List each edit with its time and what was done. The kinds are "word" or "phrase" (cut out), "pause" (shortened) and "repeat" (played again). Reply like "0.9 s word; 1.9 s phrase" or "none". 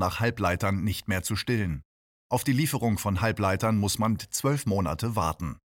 4.2 s word